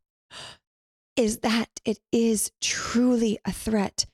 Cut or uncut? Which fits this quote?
uncut